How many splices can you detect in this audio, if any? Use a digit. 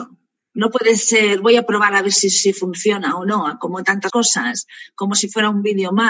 1